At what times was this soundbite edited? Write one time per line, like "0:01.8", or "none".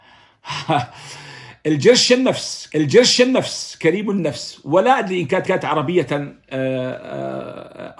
0:02.7
0:05.4